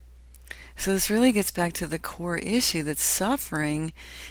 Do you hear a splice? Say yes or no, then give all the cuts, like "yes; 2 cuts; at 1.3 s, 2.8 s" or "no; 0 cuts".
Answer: no; 0 cuts